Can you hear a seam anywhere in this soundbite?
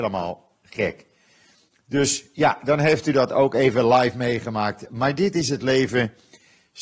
no; 0 cuts

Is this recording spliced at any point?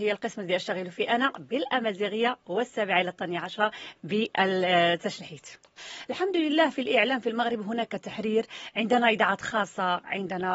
no; 0 cuts

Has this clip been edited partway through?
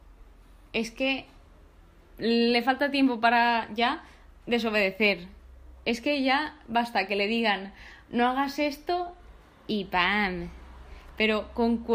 no; 0 cuts

